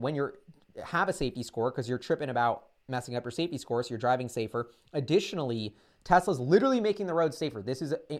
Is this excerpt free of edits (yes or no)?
yes